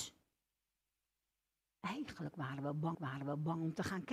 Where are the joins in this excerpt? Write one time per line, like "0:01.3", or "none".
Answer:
0:02.9